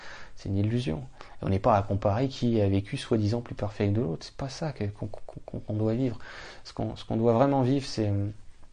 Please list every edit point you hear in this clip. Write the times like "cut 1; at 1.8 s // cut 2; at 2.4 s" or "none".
none